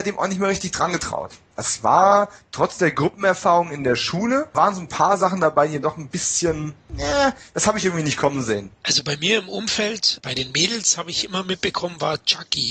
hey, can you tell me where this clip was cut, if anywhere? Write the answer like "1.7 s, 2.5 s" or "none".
8.8 s